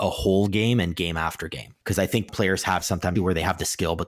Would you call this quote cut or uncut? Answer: cut